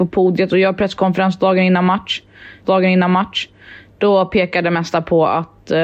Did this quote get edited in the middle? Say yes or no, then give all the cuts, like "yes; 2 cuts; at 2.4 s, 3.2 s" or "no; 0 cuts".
yes; 1 cut; at 2.6 s